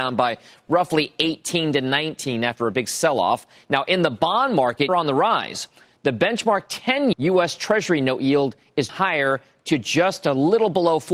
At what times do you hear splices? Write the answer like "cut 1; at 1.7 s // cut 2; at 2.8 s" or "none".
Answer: cut 1; at 4.9 s // cut 2; at 7.1 s // cut 3; at 8.9 s